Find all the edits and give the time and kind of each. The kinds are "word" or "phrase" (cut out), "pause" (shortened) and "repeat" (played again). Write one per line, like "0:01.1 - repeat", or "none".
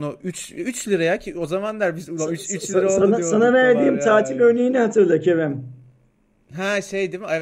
none